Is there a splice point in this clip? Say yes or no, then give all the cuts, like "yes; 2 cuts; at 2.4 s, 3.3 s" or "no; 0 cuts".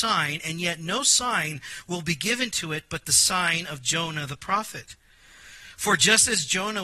no; 0 cuts